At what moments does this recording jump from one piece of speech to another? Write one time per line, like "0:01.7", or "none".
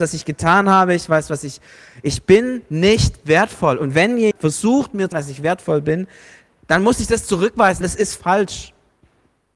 0:04.3
0:05.1
0:07.8